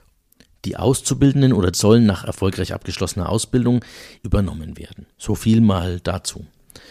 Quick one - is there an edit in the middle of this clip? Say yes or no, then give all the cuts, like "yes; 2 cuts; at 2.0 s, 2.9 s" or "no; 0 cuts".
yes; 3 cuts; at 1.7 s, 4.2 s, 5.1 s